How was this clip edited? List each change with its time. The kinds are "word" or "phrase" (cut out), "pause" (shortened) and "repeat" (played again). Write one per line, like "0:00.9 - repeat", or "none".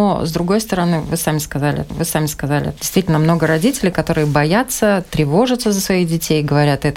0:01.9 - repeat